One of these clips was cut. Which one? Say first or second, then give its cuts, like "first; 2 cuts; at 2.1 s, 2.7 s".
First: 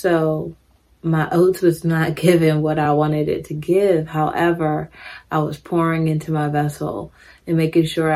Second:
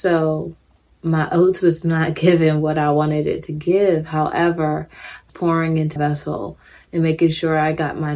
second; 2 cuts; at 5.3 s, 6.0 s